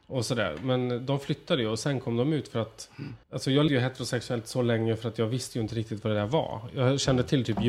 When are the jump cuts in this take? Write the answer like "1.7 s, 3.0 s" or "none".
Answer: 3.2 s, 3.7 s